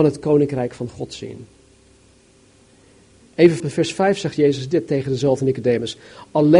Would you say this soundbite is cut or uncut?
cut